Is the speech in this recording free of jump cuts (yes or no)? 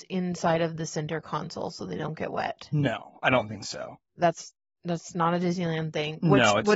yes